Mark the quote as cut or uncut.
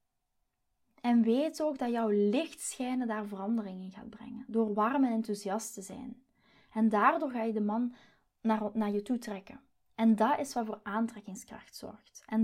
uncut